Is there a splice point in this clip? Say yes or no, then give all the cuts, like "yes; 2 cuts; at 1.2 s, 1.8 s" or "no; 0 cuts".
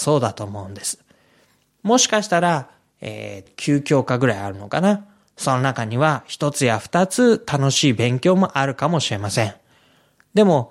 yes; 1 cut; at 3.5 s